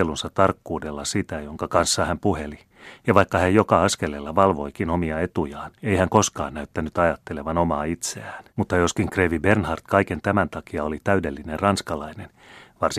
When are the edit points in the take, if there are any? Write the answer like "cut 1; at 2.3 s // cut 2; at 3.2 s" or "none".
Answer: cut 1; at 5.8 s // cut 2; at 8.5 s